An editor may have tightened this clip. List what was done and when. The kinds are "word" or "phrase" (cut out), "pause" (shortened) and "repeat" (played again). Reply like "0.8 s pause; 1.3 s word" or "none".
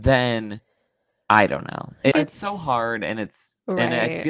2.1 s phrase

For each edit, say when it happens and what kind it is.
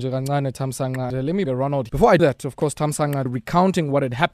1.1 s word; 1.4 s word; 1.9 s word; 2.2 s word; 3.3 s word

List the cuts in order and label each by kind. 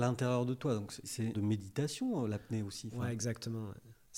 1.0 s word; 1.3 s phrase

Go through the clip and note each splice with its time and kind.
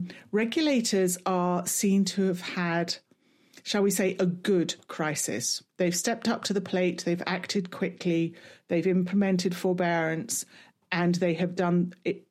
none

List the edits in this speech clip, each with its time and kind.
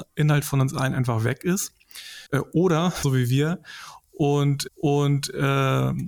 2.3 s pause; 3.0 s phrase; 4.7 s repeat

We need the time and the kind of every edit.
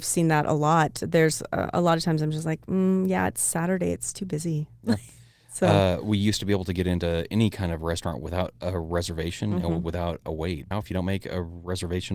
10.7 s word

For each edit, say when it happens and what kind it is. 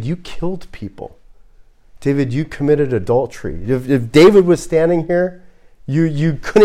none

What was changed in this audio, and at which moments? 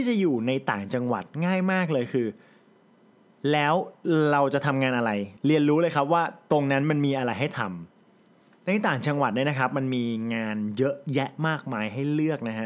5.4 s pause

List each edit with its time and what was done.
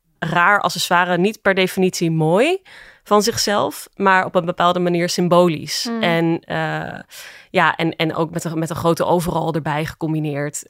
none

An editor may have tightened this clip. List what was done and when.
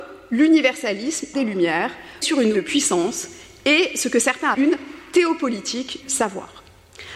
1.3 s word; 2.2 s word; 2.5 s word; 4.5 s word; 6.0 s word

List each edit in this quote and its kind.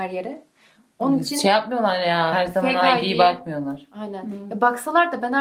2.3 s word

